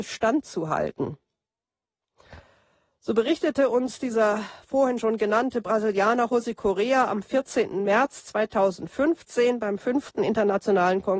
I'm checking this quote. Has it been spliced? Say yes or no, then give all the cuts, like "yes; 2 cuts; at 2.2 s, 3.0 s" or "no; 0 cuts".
no; 0 cuts